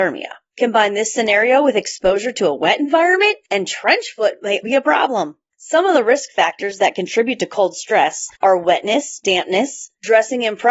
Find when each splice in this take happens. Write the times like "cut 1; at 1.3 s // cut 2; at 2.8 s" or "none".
cut 1; at 4.6 s